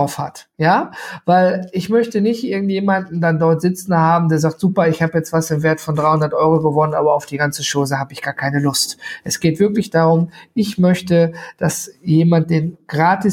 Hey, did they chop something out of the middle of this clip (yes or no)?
no